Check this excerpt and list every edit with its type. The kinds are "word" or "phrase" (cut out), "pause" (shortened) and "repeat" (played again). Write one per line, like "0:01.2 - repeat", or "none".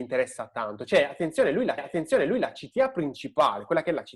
0:01.8 - repeat